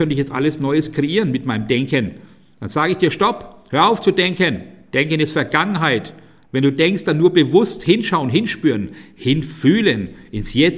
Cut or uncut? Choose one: uncut